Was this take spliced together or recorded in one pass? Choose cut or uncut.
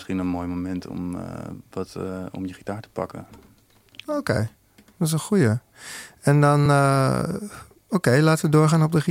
uncut